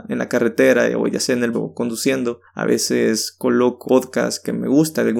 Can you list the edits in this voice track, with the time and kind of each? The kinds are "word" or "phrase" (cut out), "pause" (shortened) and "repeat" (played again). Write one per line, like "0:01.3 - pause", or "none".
0:01.5 - word
0:03.8 - word